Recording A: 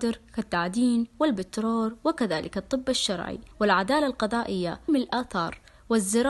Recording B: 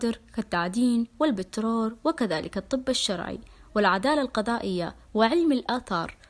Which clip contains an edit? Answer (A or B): A